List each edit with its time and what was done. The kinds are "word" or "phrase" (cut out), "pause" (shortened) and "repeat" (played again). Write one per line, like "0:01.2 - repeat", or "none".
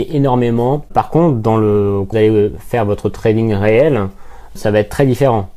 0:02.1 - word
0:04.6 - word